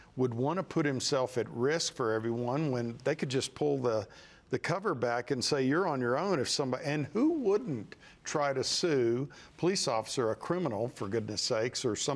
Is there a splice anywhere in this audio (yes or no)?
no